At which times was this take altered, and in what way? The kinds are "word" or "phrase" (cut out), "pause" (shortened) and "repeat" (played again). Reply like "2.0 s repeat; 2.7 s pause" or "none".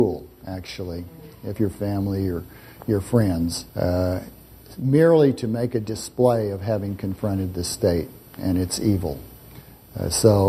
1.6 s phrase; 3.7 s pause